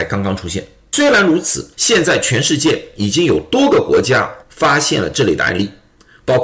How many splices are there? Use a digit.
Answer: 2